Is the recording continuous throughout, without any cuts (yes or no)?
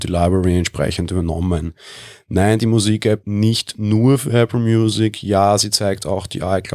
no